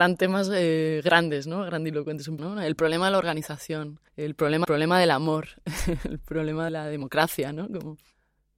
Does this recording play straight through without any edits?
no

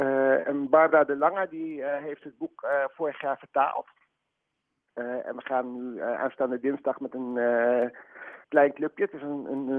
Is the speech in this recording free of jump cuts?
no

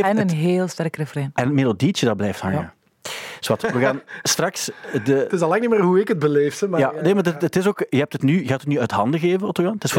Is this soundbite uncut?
yes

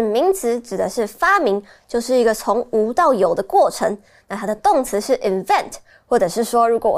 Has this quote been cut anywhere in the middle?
no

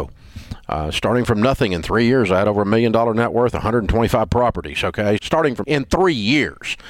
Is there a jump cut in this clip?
yes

